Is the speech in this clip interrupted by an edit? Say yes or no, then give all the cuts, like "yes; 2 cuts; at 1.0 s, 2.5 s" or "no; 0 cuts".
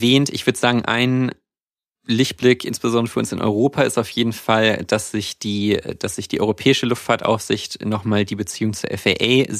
no; 0 cuts